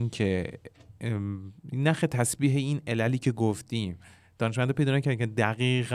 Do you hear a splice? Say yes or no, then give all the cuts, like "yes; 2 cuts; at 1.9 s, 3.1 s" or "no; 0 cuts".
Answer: no; 0 cuts